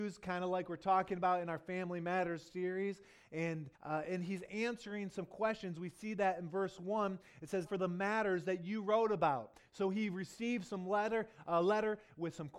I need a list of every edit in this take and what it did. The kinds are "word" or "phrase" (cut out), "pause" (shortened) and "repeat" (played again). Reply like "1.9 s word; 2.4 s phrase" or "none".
3.7 s pause; 7.6 s word